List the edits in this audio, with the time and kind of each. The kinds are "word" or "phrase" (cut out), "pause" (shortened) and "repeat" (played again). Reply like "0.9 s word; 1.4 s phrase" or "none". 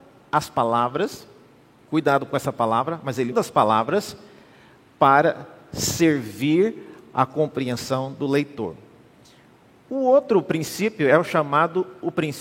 3.3 s word